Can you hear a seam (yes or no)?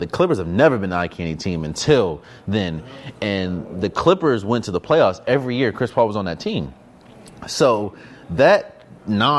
no